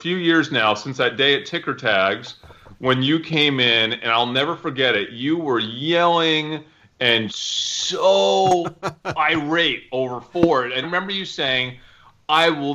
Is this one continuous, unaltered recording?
no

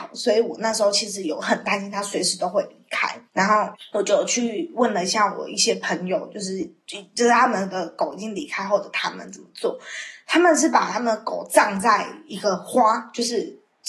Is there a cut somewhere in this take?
yes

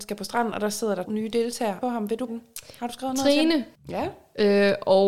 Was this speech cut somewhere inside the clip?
yes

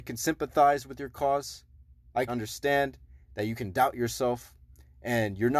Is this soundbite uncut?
no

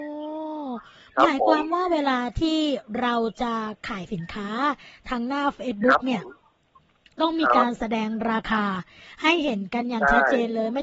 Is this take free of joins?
yes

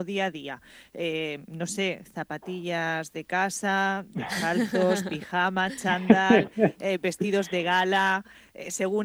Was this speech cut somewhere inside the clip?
no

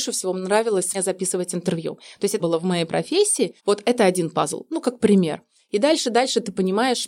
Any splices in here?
yes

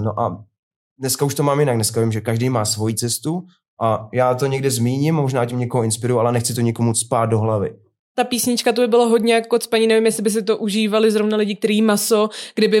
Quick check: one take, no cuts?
yes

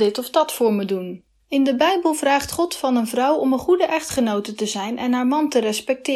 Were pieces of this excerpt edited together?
no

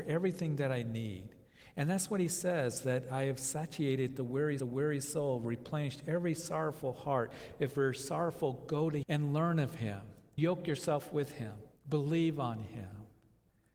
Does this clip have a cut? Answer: yes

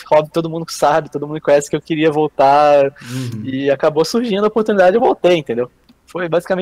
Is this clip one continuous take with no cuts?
yes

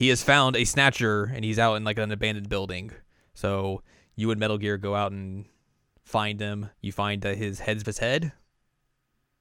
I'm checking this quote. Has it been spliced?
yes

